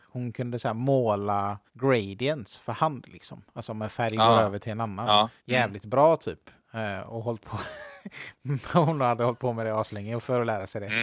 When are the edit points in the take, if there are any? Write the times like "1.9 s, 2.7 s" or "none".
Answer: 1.7 s, 5.4 s